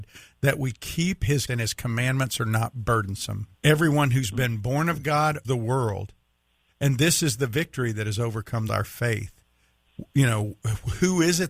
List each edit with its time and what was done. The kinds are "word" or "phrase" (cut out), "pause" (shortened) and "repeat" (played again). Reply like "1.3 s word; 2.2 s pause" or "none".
1.5 s word; 3.6 s pause; 5.4 s word; 8.7 s phrase

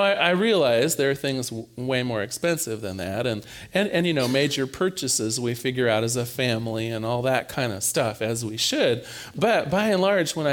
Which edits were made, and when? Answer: none

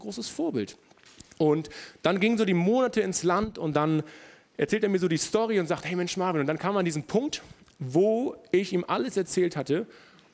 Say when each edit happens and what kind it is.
none

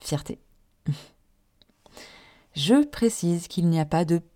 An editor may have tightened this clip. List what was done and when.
none

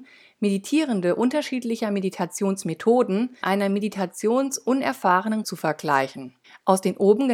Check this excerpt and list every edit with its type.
3.4 s word; 5.4 s word; 6.4 s pause

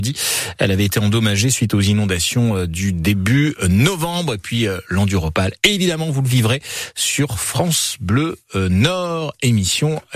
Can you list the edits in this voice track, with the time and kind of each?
none

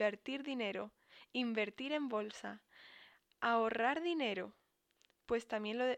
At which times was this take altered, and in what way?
none

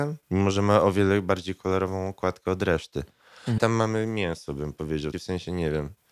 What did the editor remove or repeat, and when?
3.6 s word; 5.1 s word

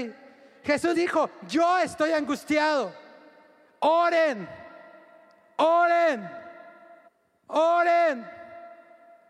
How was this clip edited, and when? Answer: 0.9 s word; 7.1 s pause

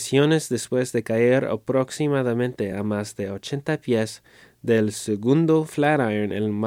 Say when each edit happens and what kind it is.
none

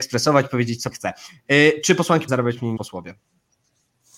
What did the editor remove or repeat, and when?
0.9 s word; 2.3 s word; 2.8 s word

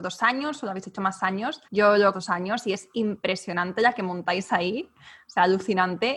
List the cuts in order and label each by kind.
1.6 s pause; 2.1 s phrase

